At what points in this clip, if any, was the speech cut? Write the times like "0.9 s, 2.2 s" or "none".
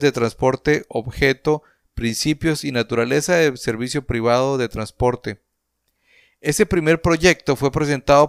none